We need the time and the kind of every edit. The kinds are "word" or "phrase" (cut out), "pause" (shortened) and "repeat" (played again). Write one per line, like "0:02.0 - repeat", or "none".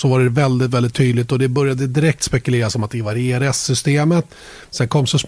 none